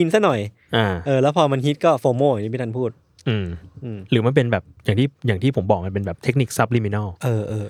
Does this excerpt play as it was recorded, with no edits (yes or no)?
yes